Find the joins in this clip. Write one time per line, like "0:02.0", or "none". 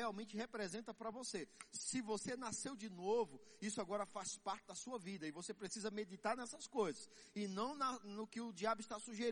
none

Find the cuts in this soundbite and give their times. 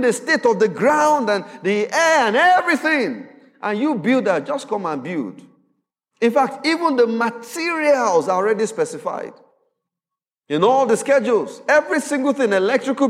none

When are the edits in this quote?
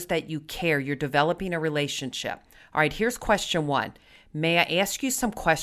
none

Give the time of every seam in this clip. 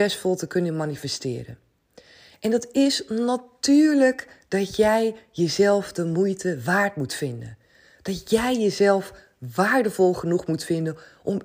none

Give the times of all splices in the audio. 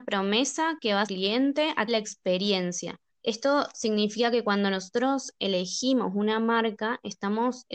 0:01.1
0:01.9
0:03.1

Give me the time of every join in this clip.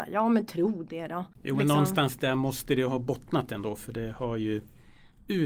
0:01.3

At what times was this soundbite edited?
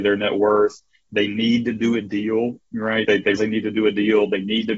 0:03.0
0:03.4

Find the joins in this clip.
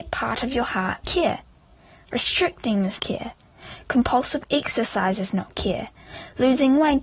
0:01.0
0:03.0

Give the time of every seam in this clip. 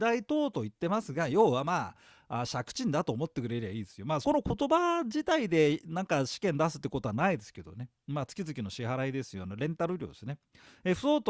0:04.2

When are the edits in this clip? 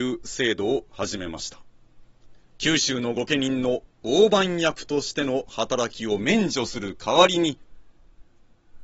0:02.4

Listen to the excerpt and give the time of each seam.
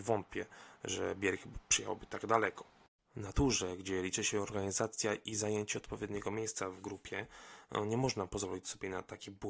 none

